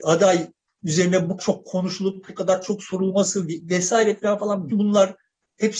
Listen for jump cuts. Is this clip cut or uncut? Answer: cut